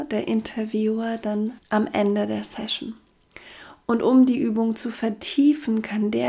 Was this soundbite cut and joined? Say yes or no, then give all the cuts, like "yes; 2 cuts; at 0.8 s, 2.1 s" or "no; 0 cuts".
yes; 1 cut; at 1.6 s